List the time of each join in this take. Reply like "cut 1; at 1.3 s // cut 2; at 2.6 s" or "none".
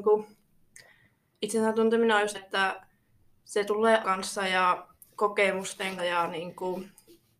cut 1; at 2.3 s // cut 2; at 4.0 s // cut 3; at 6.0 s